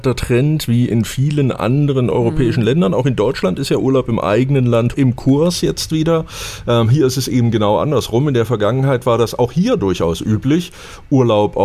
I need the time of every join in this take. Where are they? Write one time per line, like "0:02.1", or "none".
0:04.9